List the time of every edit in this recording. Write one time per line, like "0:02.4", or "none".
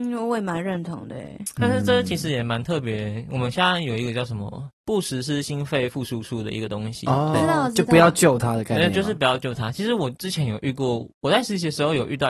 0:04.8
0:07.3